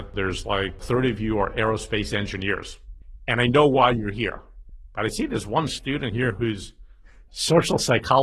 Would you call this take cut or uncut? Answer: uncut